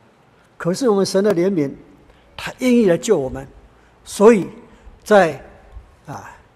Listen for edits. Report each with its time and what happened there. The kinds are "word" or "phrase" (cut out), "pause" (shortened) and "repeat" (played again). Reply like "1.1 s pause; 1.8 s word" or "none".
5.0 s pause